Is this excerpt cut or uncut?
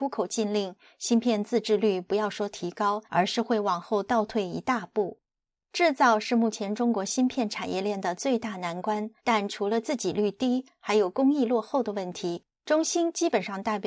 cut